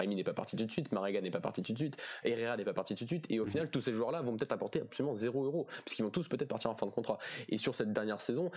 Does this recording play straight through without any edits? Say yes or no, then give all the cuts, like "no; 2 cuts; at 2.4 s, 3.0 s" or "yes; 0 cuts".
yes; 0 cuts